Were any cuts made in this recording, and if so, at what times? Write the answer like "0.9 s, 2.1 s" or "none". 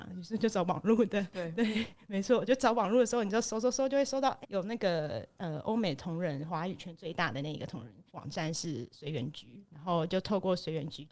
4.4 s, 8.1 s